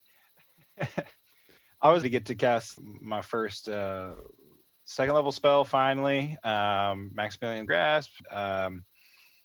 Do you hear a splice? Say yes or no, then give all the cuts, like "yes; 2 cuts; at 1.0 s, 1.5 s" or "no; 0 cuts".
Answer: yes; 4 cuts; at 2.0 s, 2.8 s, 7.7 s, 8.2 s